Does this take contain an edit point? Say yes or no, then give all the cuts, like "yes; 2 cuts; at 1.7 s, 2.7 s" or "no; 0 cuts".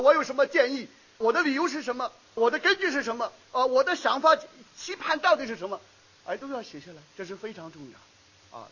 yes; 2 cuts; at 1.2 s, 2.4 s